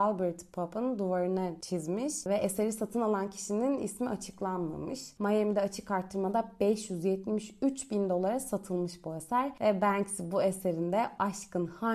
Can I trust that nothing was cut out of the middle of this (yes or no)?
yes